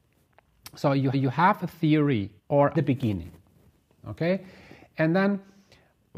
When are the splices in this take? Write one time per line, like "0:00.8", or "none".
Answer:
0:01.1
0:02.4
0:02.7